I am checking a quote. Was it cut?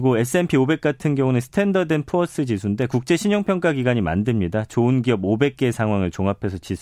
no; 0 cuts

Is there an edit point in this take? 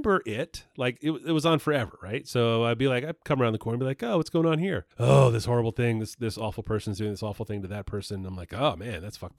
yes; 1 cut; at 4.9 s

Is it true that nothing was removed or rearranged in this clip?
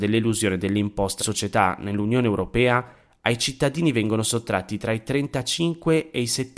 no; 1 cut; at 1.2 s

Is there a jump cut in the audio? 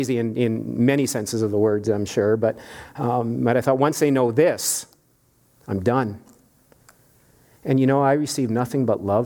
no; 0 cuts

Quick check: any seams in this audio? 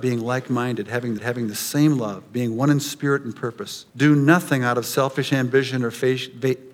yes; 2 cuts; at 1.2 s, 3.9 s

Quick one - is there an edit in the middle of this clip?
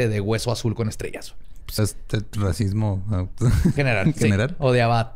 yes; 2 cuts; at 1.8 s, 3.8 s

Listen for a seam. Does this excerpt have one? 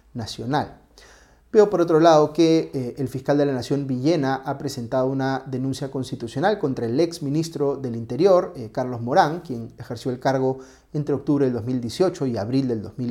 no; 0 cuts

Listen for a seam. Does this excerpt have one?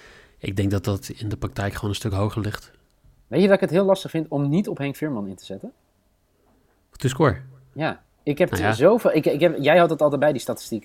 no; 0 cuts

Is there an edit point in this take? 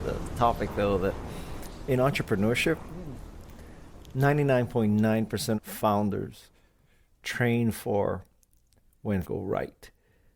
yes; 2 cuts; at 5.5 s, 9.2 s

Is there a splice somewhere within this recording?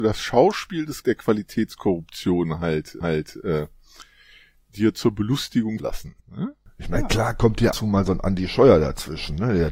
yes; 5 cuts; at 1.0 s, 3.0 s, 5.8 s, 6.2 s, 7.7 s

